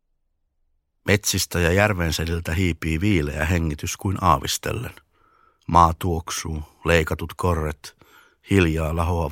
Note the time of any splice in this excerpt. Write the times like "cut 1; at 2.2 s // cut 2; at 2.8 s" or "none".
none